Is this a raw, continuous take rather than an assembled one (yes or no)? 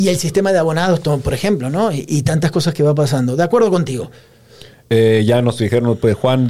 yes